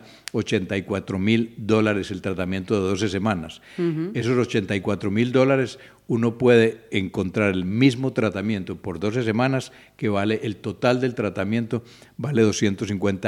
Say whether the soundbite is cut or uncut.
uncut